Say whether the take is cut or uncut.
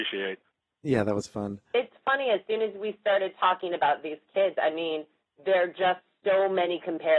uncut